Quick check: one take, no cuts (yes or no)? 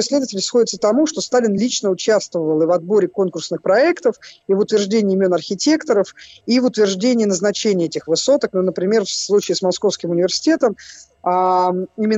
yes